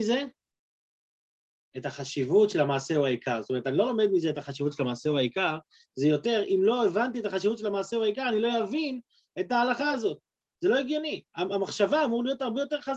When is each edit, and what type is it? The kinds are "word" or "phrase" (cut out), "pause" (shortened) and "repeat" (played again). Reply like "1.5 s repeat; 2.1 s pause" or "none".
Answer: 11.3 s pause